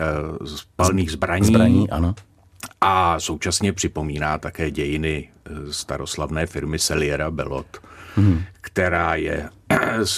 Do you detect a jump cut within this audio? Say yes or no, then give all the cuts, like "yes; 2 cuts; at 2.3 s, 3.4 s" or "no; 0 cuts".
no; 0 cuts